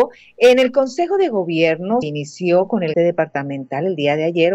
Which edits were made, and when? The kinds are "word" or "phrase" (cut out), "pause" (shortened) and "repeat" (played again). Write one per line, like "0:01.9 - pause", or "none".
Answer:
0:02.0 - word
0:02.9 - word